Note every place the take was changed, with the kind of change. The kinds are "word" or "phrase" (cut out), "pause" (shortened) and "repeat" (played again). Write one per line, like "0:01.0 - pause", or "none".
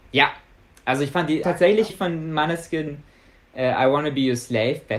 0:01.4 - word
0:01.9 - word